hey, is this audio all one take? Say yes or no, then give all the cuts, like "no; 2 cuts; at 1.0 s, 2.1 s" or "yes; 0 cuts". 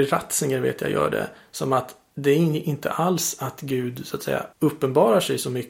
no; 1 cut; at 4.5 s